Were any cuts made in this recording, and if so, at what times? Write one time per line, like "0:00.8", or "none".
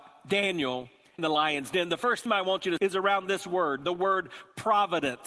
0:01.2
0:02.3
0:02.8